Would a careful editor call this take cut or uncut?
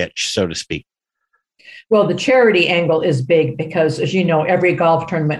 uncut